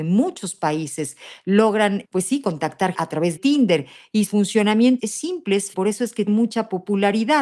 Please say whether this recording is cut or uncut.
cut